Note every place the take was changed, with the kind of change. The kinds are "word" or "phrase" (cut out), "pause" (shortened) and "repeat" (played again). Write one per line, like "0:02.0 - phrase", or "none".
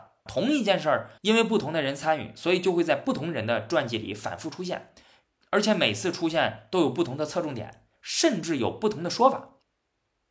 0:01.2 - pause
0:07.9 - pause